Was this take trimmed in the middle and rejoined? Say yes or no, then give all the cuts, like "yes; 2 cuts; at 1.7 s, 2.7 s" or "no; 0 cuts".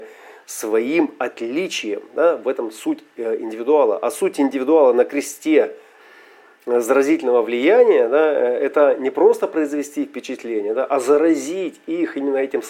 no; 0 cuts